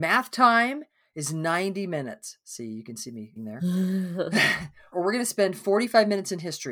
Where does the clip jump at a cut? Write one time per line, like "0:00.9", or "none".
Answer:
0:03.4
0:04.9